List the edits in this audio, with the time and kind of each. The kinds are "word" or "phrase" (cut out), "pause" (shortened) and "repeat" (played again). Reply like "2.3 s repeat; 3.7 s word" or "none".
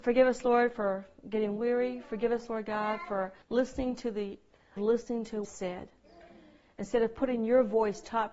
3.4 s pause; 4.8 s phrase; 5.4 s phrase

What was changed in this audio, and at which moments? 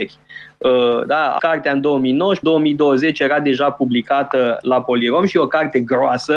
1.4 s word; 2.4 s word

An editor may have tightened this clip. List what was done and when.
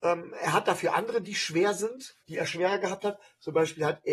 1.2 s word; 2.2 s pause

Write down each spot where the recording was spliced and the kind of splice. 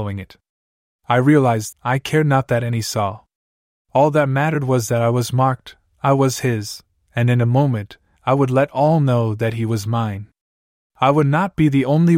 1.7 s word

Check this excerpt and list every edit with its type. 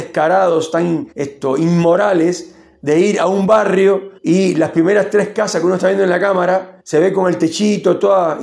1.1 s pause; 4.2 s pause; 6.8 s pause

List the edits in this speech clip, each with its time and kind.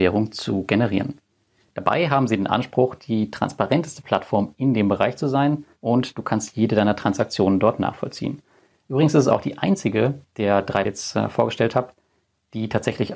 5.7 s pause; 10.8 s phrase

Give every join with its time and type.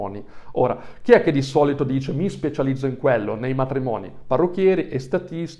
none

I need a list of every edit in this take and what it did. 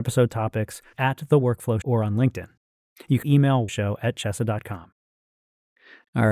0.9 s word; 1.8 s word; 3.2 s word; 3.7 s word

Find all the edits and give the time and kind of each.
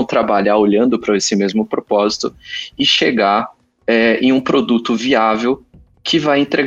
none

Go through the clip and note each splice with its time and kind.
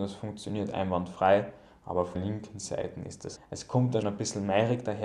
2.1 s word; 3.4 s word; 4.0 s word

